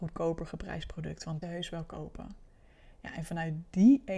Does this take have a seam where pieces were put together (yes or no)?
yes